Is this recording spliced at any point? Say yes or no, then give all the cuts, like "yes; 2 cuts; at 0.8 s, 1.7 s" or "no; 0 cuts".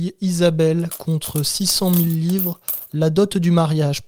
no; 0 cuts